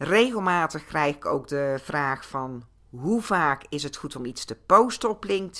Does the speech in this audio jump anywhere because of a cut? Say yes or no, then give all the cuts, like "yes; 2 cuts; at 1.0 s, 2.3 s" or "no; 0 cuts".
no; 0 cuts